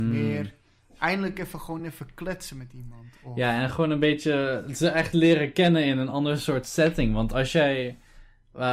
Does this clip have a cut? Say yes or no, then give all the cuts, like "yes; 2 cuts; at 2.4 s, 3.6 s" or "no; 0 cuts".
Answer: no; 0 cuts